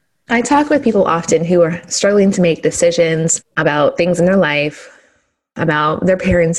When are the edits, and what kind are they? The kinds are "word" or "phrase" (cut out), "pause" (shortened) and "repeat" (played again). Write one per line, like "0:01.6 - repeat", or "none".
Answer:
none